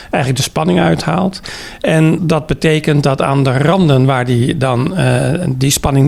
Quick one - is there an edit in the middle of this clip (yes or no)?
yes